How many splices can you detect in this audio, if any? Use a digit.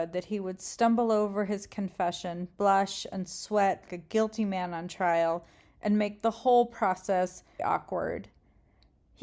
2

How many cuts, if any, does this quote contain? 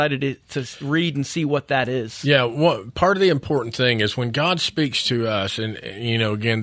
0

